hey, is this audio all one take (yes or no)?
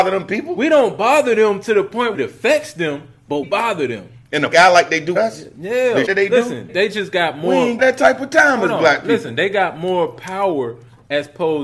no